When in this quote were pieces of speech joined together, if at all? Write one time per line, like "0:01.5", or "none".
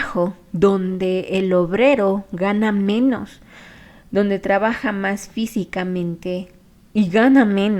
none